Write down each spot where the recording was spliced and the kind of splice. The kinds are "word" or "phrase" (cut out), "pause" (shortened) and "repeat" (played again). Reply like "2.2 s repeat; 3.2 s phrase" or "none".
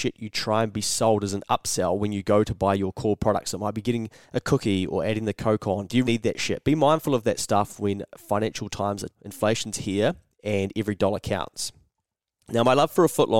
4.2 s pause; 6.0 s word; 9.1 s word